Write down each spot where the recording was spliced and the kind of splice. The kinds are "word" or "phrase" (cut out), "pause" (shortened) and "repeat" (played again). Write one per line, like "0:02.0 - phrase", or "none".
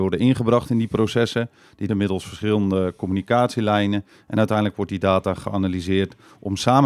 0:01.9 - phrase